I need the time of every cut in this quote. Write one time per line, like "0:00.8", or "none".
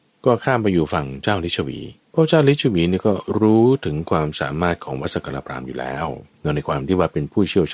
0:02.0
0:06.3